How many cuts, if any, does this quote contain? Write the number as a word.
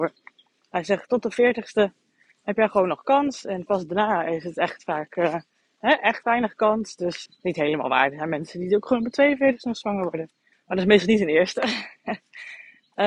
two